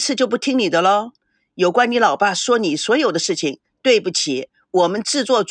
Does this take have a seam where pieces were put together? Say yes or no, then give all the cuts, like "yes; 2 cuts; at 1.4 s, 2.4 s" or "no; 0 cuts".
no; 0 cuts